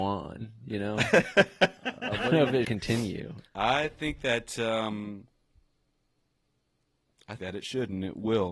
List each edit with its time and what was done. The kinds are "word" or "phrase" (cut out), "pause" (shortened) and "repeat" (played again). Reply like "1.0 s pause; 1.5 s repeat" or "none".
1.8 s pause; 2.6 s word; 3.5 s pause; 7.4 s word